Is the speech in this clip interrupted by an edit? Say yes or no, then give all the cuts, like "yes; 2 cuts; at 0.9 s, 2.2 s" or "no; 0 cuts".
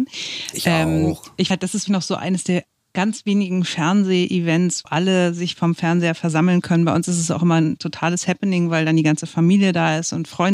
yes; 3 cuts; at 1.5 s, 1.9 s, 4.8 s